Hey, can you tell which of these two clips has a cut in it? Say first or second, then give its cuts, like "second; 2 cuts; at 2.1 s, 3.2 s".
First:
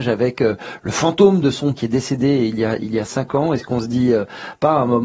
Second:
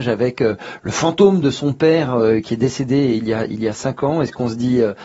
first; 1 cut; at 1.8 s